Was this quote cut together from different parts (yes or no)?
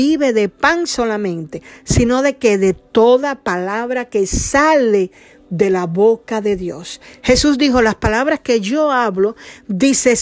no